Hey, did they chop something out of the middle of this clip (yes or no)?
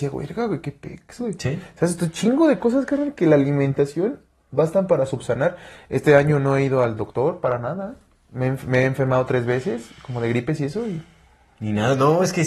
no